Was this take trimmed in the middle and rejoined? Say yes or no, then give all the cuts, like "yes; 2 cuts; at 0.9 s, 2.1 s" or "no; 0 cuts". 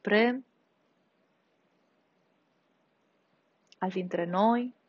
yes; 1 cut; at 3.9 s